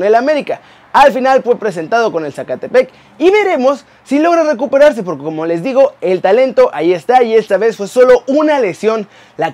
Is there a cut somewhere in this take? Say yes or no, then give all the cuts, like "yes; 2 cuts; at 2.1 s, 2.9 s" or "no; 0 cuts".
no; 0 cuts